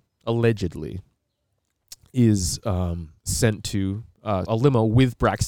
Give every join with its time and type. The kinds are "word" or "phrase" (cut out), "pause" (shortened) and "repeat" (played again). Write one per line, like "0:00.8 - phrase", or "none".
0:03.2 - pause
0:04.4 - word